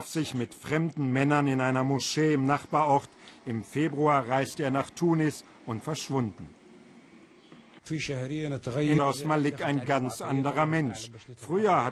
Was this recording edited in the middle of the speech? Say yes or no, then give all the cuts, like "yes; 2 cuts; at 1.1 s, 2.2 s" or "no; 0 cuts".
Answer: yes; 2 cuts; at 5.8 s, 9.0 s